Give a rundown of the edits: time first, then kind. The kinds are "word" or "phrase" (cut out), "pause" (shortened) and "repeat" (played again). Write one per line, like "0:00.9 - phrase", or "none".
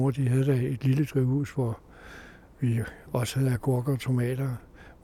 none